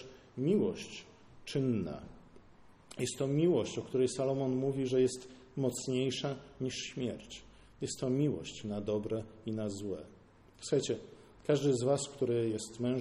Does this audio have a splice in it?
no; 0 cuts

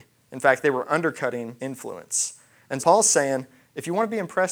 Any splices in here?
yes; 2 cuts; at 1.6 s, 2.8 s

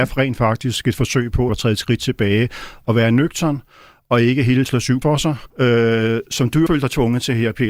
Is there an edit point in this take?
yes; 5 cuts; at 1.5 s, 4.7 s, 5.0 s, 5.5 s, 6.7 s

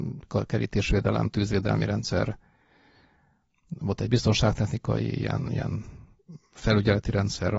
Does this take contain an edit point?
no; 0 cuts

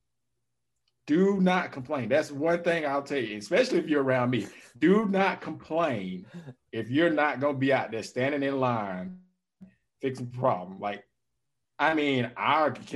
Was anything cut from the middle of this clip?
no; 0 cuts

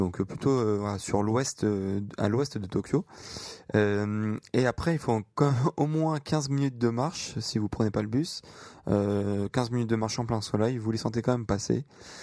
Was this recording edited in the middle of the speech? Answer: no; 0 cuts

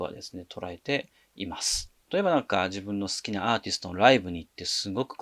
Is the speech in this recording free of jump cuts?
no; 1 cut; at 2.0 s

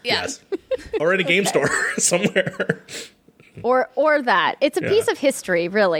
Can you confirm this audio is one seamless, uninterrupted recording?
yes; 0 cuts

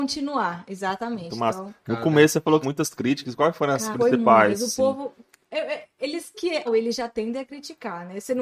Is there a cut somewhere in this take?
yes; 4 cuts; at 2.6 s, 3.9 s, 6.3 s, 6.7 s

